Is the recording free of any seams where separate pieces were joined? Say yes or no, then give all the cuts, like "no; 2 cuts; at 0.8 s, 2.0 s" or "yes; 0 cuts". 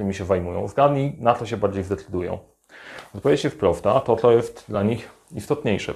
yes; 0 cuts